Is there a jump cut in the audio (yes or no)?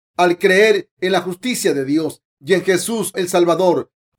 yes